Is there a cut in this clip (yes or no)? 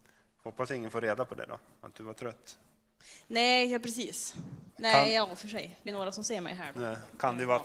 yes